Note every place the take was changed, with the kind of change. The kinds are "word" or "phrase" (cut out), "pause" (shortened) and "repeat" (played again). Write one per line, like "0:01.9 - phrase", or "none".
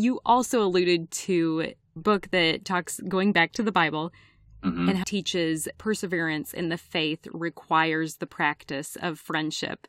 0:02.0 - word
0:05.0 - word
0:05.7 - word

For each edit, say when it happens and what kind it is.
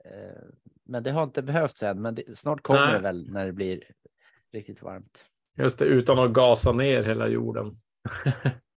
none

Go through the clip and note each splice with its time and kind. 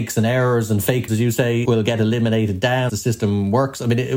0:01.1 - word
0:01.6 - word
0:02.9 - word

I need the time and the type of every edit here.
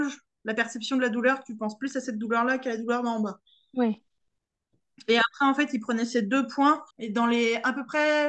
0:06.9 - pause

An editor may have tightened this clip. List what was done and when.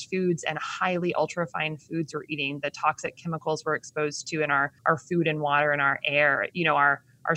0:04.8 - pause

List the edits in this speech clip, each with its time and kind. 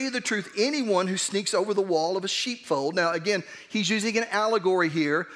none

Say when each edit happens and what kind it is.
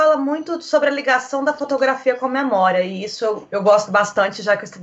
none

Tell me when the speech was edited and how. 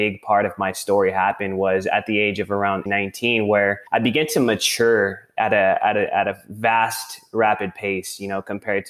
0:02.9 - word
0:03.9 - pause

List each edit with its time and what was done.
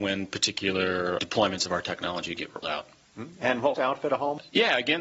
0:01.2 - word
0:02.6 - word
0:03.7 - phrase

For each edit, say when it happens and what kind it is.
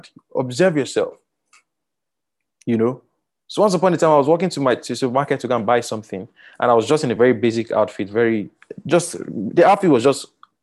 none

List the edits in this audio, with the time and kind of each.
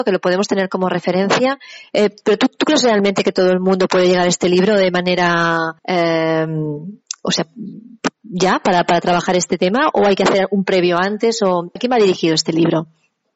0:05.8 - pause
0:11.8 - word

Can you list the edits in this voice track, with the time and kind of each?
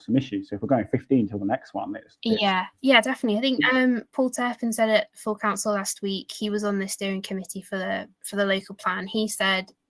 0:02.7 - pause
0:08.1 - pause

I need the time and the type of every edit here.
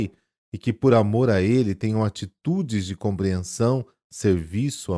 none

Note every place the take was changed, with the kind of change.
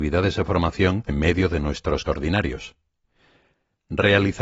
0:01.1 - word
0:02.1 - word

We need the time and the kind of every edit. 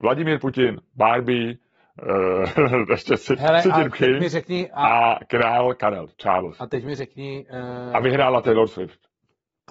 none

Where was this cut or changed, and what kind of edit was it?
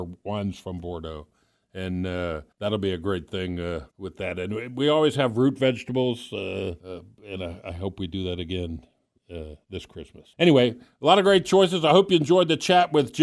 0:02.5 - pause
0:03.9 - pause
0:06.8 - pause
0:10.3 - pause

